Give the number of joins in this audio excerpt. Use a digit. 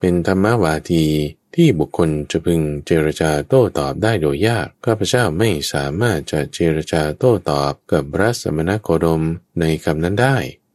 4